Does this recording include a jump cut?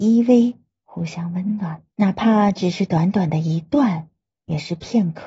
yes; 1 cut; at 1.9 s

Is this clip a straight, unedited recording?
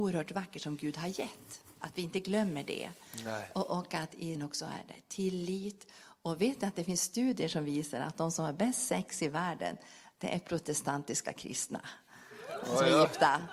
no; 1 cut; at 4.3 s

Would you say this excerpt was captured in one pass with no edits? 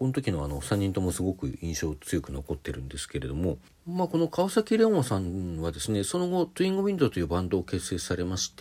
no; 1 cut; at 3.7 s

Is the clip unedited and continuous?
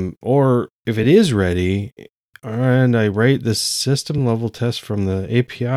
yes; 0 cuts

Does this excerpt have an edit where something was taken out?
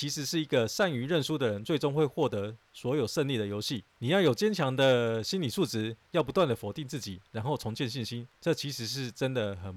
yes; 2 cuts; at 3.9 s, 8.4 s

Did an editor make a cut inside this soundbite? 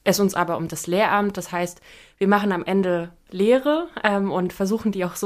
no; 0 cuts

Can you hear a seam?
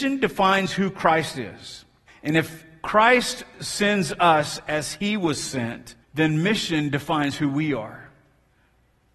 yes; 2 cuts; at 2.1 s, 6.0 s

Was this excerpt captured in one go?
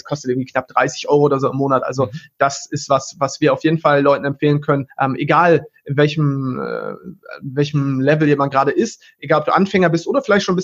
no; 1 cut; at 4.9 s

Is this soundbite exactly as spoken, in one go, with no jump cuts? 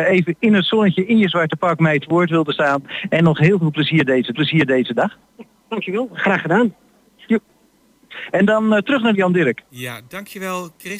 no; 2 cuts; at 4.3 s, 9.1 s

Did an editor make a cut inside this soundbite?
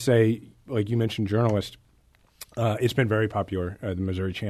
no; 0 cuts

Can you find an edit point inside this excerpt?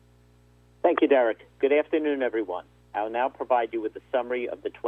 no; 0 cuts

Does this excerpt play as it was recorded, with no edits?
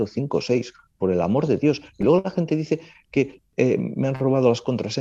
yes; 0 cuts

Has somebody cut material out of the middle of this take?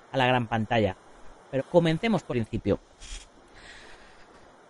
yes; 2 cuts; at 1.6 s, 2.3 s

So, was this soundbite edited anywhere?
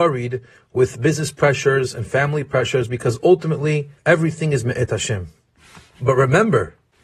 yes; 1 cut; at 4.0 s

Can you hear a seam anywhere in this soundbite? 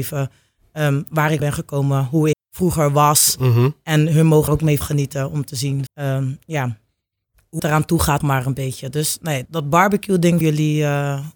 yes; 9 cuts; at 1.4 s, 2.3 s, 4.5 s, 4.8 s, 5.9 s, 7.6 s, 8.2 s, 9.5 s, 10.4 s

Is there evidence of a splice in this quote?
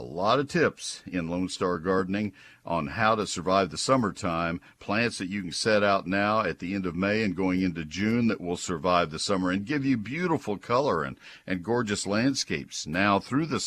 no; 0 cuts

